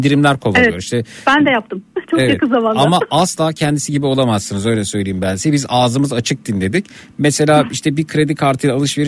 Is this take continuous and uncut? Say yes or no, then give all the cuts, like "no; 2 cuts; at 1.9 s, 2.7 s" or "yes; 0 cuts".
yes; 0 cuts